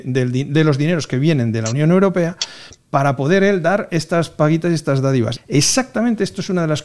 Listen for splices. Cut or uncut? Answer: cut